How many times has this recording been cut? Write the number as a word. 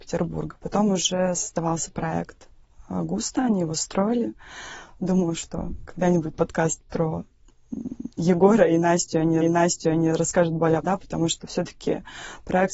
four